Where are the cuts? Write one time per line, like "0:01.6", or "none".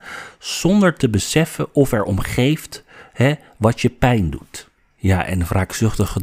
none